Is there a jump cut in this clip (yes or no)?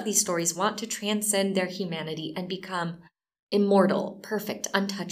no